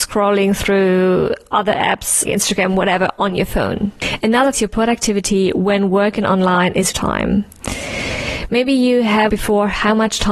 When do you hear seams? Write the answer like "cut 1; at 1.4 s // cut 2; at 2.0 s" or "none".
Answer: cut 1; at 2.2 s // cut 2; at 4.5 s // cut 3; at 6.9 s // cut 4; at 9.3 s